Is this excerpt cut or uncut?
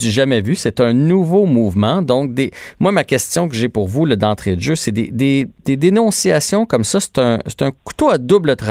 cut